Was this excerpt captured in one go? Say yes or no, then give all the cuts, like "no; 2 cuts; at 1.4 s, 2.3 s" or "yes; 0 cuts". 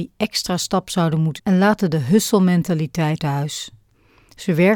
no; 2 cuts; at 1.4 s, 3.2 s